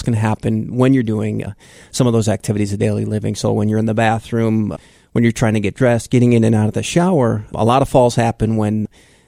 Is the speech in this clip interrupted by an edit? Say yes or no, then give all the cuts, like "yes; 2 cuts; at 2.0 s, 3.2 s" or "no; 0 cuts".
no; 0 cuts